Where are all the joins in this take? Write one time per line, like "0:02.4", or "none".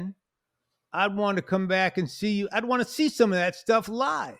none